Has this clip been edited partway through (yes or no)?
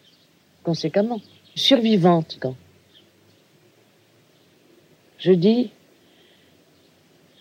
yes